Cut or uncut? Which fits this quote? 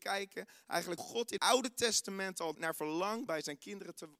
cut